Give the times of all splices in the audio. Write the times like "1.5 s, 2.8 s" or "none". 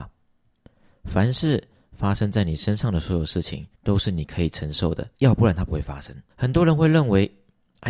3.7 s, 5.1 s, 6.3 s